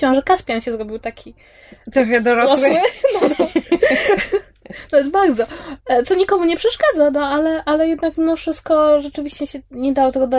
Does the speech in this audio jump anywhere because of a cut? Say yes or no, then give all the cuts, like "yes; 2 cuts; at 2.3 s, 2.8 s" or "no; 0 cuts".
no; 0 cuts